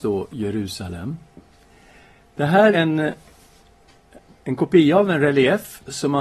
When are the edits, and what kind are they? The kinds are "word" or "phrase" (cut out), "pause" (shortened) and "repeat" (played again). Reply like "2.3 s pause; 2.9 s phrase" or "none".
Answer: 2.7 s word